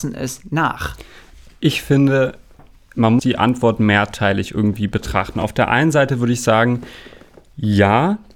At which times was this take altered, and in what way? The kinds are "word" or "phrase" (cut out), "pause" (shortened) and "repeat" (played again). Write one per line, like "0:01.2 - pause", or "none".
0:03.2 - word